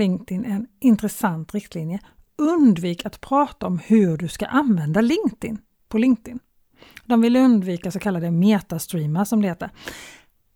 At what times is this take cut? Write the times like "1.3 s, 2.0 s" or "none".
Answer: none

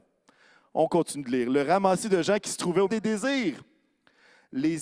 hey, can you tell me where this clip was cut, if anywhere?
2.9 s

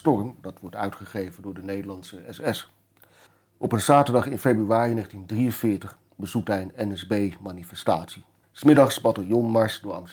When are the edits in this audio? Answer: 3.3 s, 8.4 s

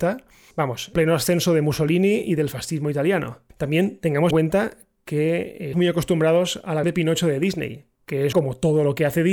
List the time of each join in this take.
0.9 s, 3.5 s, 4.3 s, 5.7 s, 6.8 s, 8.3 s

